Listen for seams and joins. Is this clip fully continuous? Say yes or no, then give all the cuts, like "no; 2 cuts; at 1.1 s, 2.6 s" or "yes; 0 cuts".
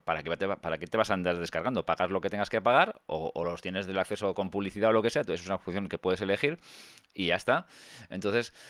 yes; 0 cuts